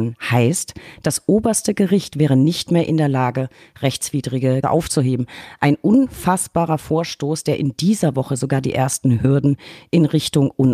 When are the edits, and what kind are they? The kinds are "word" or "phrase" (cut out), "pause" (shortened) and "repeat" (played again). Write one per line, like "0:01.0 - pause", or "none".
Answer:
0:04.6 - word